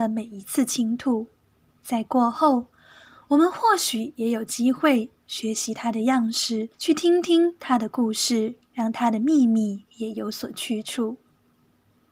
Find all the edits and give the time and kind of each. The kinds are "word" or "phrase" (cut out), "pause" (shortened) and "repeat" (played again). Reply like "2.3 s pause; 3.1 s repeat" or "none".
6.7 s pause